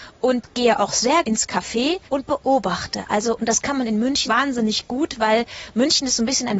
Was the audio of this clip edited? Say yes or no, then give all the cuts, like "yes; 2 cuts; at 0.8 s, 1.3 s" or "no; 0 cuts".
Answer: yes; 3 cuts; at 1.2 s, 2.1 s, 4.3 s